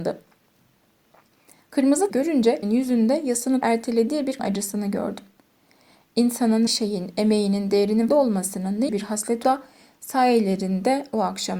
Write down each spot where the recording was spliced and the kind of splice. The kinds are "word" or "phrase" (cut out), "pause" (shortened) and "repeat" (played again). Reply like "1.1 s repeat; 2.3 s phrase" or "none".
2.1 s word; 2.6 s word; 3.6 s word; 4.4 s word; 6.7 s word; 8.1 s word; 8.9 s word; 9.4 s word